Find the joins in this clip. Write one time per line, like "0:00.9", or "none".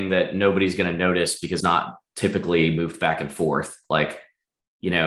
0:01.6